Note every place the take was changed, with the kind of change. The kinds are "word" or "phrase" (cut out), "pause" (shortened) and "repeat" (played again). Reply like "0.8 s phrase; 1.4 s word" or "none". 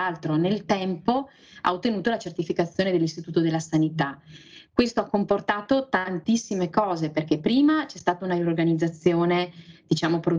none